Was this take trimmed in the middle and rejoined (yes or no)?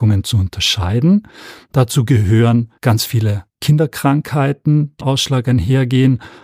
yes